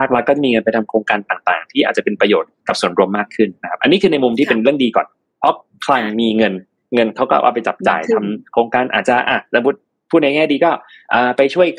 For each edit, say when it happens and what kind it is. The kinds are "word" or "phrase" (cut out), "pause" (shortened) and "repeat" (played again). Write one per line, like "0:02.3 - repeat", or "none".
none